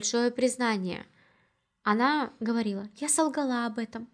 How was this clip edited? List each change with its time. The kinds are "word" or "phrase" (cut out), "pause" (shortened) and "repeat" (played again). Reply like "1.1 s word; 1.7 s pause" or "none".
none

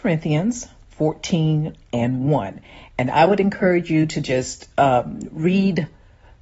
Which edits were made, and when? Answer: none

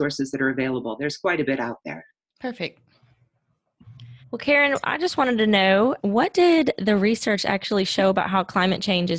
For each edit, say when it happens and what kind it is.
4.2 s pause; 6.0 s word

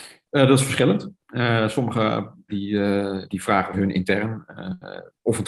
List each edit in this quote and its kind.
2.5 s word; 3.3 s word; 3.7 s phrase

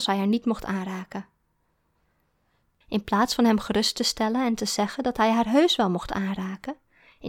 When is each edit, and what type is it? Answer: none

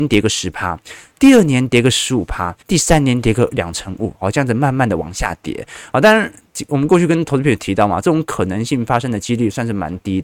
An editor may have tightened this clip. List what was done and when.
2.6 s pause

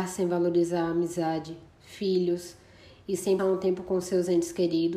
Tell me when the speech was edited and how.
1.8 s word; 3.4 s word

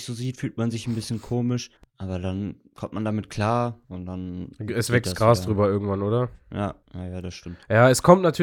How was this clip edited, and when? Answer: 1.8 s pause; 3.8 s pause; 6.8 s pause

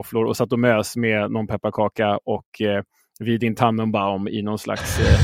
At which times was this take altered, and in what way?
none

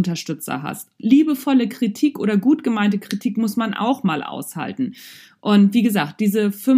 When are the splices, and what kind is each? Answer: none

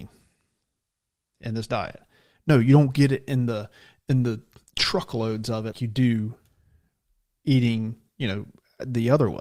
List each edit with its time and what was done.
5.7 s word

